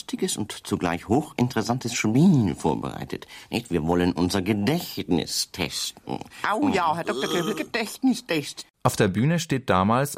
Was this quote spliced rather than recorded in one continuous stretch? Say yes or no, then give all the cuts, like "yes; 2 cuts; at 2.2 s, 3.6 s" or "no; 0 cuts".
no; 0 cuts